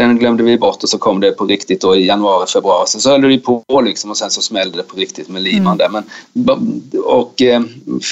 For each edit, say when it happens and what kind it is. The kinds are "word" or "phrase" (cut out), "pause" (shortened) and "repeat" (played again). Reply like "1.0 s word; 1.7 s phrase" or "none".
none